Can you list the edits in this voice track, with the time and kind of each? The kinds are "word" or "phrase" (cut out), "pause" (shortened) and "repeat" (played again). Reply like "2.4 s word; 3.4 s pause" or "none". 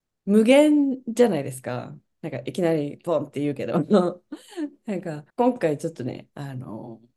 5.3 s pause